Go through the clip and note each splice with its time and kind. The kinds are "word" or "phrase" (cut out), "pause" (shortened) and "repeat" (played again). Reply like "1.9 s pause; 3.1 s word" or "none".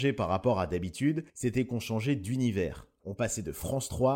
1.3 s pause